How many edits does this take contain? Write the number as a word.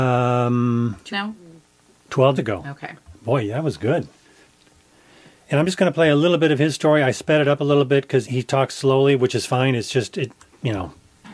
three